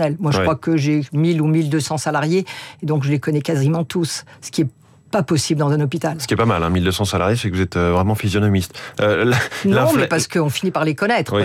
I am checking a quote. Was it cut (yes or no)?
no